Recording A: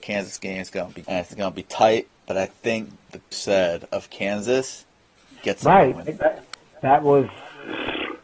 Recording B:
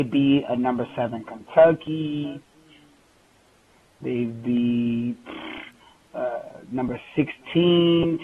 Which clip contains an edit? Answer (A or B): A